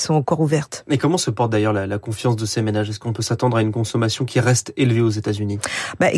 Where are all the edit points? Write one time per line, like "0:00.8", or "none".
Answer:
none